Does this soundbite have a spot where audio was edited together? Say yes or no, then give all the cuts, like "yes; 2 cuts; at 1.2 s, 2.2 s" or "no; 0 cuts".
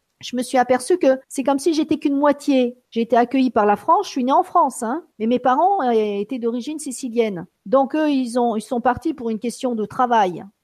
yes; 4 cuts; at 1.2 s, 2.8 s, 5.1 s, 7.5 s